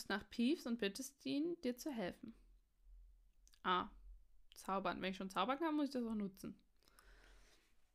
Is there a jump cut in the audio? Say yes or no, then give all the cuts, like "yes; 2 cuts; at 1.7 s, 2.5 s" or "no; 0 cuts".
no; 0 cuts